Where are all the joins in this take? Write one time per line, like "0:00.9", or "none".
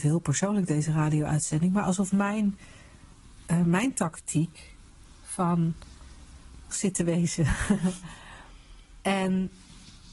0:06.7